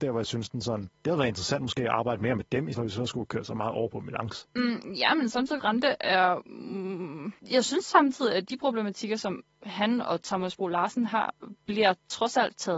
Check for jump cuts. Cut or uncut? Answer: cut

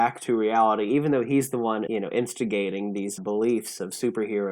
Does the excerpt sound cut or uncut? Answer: cut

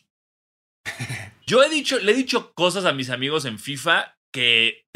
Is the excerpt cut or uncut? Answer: uncut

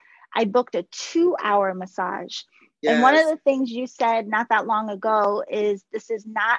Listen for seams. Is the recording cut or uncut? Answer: uncut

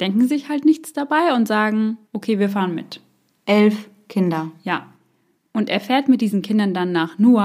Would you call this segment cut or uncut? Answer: cut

